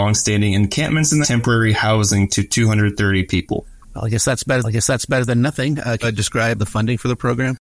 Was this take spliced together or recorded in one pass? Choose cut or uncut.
cut